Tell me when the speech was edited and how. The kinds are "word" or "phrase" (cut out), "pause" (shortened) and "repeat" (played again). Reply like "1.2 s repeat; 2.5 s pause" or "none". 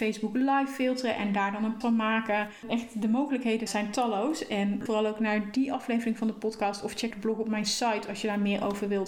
1.8 s word; 3.7 s word; 4.9 s word; 7.1 s word